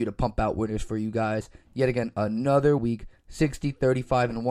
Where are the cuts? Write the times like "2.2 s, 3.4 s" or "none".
2.8 s